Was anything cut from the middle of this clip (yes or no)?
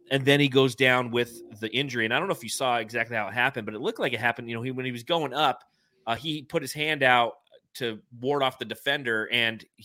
no